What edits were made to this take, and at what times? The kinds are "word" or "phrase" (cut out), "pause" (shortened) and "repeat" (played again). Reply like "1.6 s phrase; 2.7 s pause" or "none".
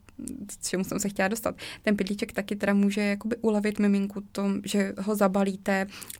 none